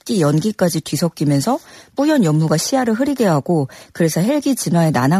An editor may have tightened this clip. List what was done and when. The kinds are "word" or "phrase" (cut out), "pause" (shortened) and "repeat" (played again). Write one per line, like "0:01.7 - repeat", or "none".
none